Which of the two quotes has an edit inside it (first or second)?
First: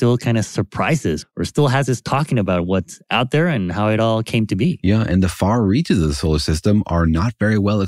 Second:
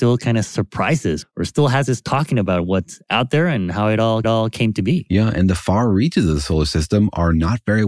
second